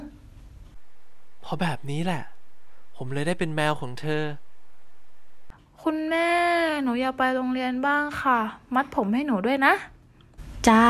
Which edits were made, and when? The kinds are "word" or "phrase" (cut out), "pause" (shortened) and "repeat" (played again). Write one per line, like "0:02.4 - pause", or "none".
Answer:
none